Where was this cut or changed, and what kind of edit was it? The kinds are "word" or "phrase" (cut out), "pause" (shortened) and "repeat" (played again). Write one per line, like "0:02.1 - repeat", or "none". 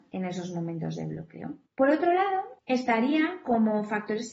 0:01.6 - pause
0:02.6 - pause